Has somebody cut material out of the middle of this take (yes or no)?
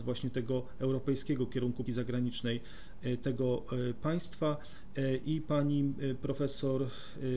yes